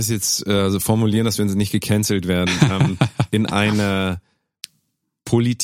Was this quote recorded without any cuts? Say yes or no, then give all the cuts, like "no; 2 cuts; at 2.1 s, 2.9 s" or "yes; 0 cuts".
yes; 0 cuts